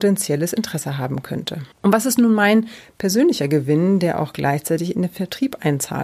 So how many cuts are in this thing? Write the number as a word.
one